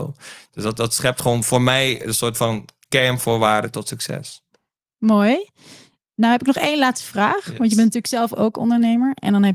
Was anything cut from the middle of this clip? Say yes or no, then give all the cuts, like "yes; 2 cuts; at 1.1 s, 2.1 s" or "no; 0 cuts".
no; 0 cuts